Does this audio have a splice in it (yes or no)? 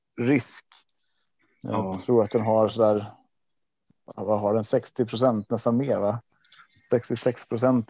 no